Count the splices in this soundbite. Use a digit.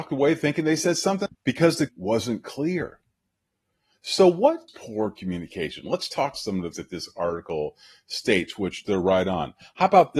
5